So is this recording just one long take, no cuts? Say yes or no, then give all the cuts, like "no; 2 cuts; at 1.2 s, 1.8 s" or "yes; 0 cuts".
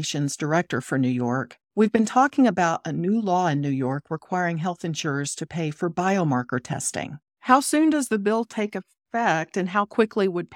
no; 2 cuts; at 1.6 s, 7.3 s